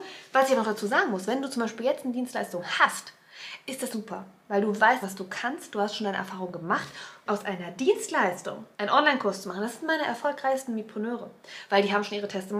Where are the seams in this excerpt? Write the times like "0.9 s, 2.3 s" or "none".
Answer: 3.9 s, 5.0 s, 7.3 s, 8.7 s